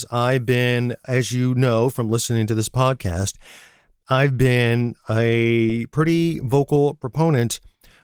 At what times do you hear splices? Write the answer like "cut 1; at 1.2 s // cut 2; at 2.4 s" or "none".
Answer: cut 1; at 1.0 s